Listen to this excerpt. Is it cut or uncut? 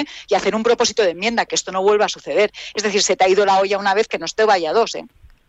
uncut